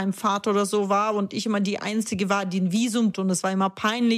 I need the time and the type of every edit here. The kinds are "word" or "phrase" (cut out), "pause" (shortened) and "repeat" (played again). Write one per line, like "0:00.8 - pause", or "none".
0:03.1 - word